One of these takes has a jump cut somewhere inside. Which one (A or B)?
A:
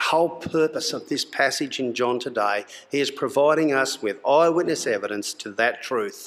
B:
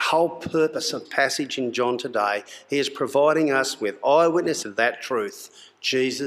B